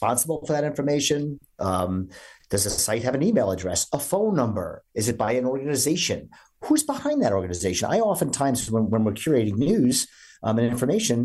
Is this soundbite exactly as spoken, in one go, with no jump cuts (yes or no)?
yes